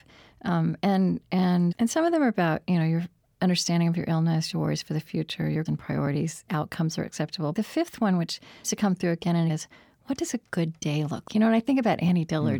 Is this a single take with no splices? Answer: no; 8 cuts; at 1.7 s, 4.5 s, 5.7 s, 6.5 s, 7.5 s, 8.6 s, 9.5 s, 11.3 s

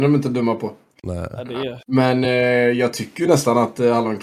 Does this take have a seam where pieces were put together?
no; 0 cuts

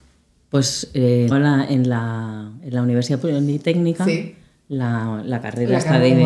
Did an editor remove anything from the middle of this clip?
yes; 1 cut; at 1.3 s

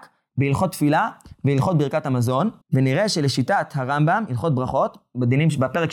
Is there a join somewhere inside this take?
yes; 1 cut; at 2.6 s

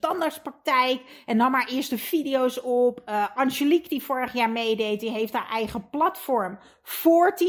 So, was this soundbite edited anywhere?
no; 0 cuts

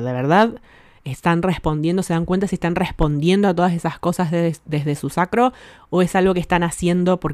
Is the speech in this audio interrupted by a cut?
no; 0 cuts

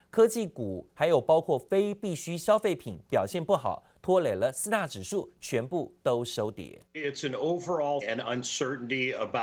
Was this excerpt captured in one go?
no; 2 cuts; at 6.9 s, 8.0 s

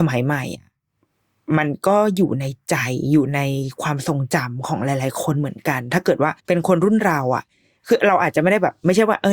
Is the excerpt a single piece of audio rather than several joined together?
no; 1 cut; at 6.4 s

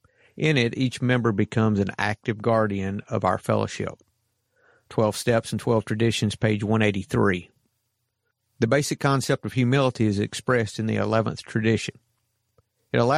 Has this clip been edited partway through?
no; 0 cuts

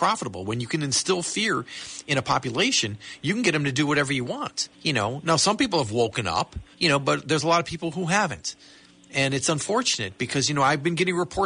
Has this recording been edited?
yes; 2 cuts; at 4.7 s, 6.7 s

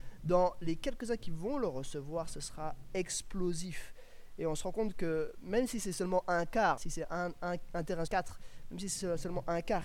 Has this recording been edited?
yes; 2 cuts; at 6.8 s, 8.1 s

